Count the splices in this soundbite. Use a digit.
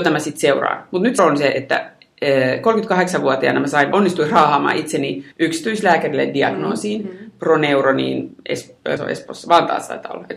5